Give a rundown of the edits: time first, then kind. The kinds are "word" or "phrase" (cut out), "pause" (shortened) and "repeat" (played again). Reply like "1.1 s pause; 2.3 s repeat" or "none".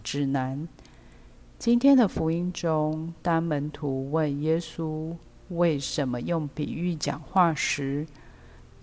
none